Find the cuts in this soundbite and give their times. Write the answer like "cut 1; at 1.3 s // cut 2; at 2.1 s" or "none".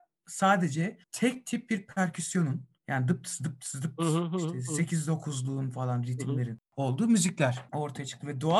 cut 1; at 1.0 s // cut 2; at 2.8 s // cut 3; at 6.6 s